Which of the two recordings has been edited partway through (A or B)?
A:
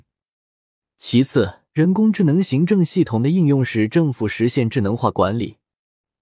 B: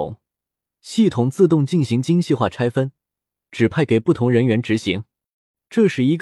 A